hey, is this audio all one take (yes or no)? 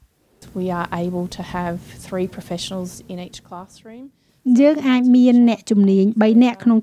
yes